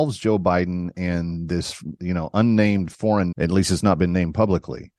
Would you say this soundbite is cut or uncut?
cut